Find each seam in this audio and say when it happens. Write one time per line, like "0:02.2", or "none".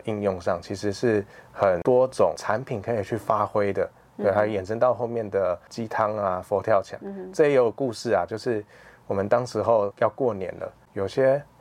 none